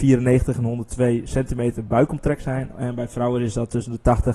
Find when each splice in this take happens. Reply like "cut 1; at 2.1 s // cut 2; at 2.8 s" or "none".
none